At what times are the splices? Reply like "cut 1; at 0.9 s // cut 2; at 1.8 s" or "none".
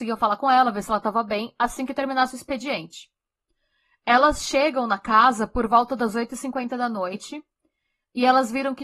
none